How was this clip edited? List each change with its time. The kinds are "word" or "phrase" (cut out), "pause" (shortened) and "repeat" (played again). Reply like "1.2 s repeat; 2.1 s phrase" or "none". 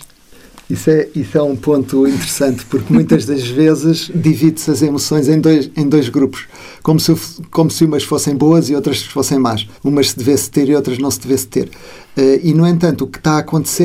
9.8 s pause